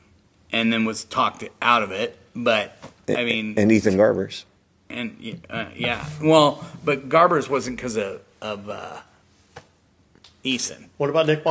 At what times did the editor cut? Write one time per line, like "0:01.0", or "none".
none